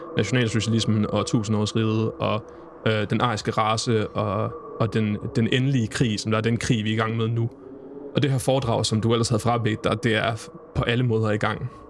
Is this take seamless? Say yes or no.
yes